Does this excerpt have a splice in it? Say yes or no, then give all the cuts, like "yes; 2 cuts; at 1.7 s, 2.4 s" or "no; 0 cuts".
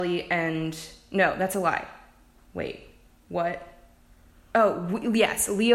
no; 0 cuts